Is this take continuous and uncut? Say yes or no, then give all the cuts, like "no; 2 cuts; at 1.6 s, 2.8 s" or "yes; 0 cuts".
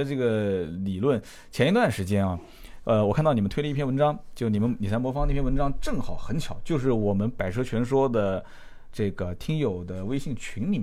yes; 0 cuts